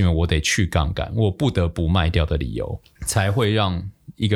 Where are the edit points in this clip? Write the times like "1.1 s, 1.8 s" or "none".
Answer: 3.0 s

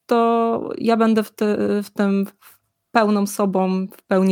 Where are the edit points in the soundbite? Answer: none

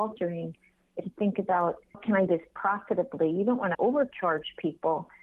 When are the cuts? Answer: 1.0 s, 1.9 s, 2.3 s, 3.7 s

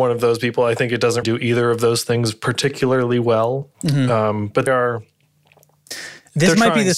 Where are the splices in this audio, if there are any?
1.2 s, 3.7 s, 4.7 s

